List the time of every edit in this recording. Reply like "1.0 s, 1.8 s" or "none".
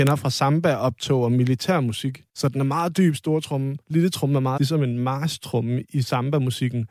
2.3 s, 3.8 s, 4.6 s